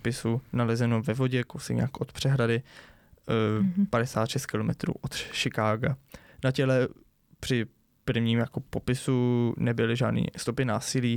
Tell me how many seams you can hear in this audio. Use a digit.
0